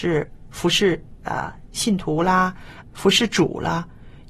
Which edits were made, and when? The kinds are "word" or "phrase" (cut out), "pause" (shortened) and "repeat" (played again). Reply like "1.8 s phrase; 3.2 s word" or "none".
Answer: 1.2 s pause; 2.8 s word